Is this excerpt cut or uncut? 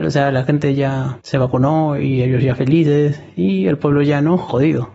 uncut